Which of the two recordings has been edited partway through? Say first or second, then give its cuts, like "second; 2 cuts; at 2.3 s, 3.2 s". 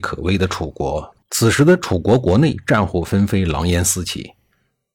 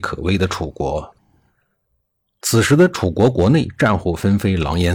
first; 1 cut; at 1.2 s